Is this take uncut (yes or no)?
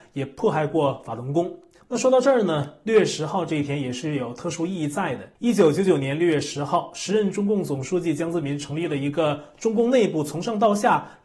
no